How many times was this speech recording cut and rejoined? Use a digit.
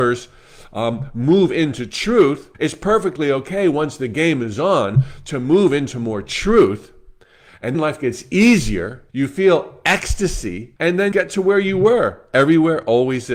5